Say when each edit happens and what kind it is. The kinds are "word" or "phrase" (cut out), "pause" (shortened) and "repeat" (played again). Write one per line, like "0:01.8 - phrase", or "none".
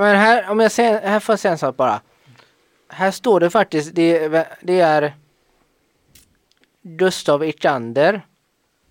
none